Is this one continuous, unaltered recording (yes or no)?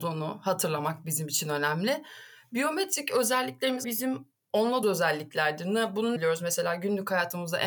no